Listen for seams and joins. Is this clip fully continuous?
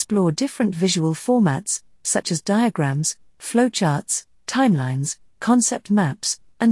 yes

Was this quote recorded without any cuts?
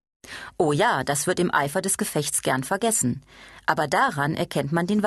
yes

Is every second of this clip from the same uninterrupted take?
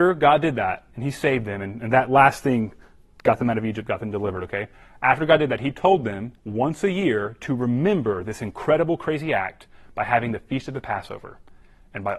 no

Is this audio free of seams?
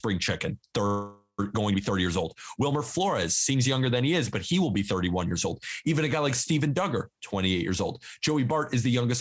yes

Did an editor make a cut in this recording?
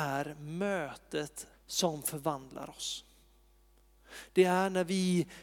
yes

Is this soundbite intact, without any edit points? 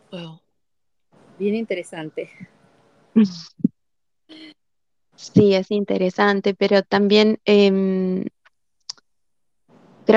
yes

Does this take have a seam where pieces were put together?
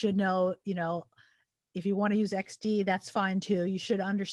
no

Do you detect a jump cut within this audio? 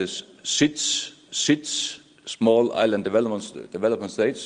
yes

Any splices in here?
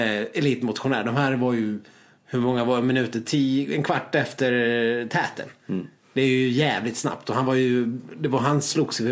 no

